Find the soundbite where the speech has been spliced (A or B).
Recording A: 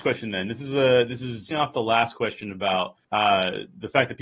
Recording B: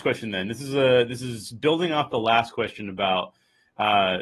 A